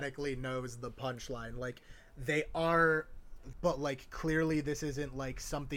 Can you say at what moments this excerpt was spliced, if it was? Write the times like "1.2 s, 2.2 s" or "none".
3.5 s